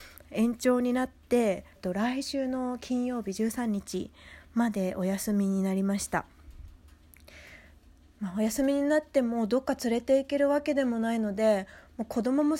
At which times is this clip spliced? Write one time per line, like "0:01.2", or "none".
0:01.8